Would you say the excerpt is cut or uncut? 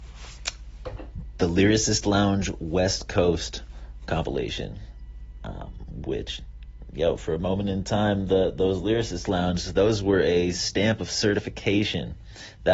uncut